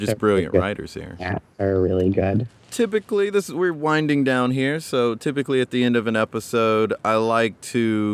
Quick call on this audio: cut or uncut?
cut